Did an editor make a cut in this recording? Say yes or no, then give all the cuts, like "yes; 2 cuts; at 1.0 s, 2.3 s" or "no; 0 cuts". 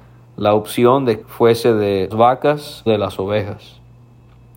yes; 3 cuts; at 1.2 s, 2.1 s, 2.9 s